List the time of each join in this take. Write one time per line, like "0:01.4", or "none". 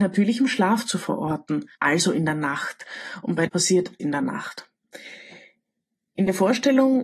0:01.7
0:03.5
0:04.0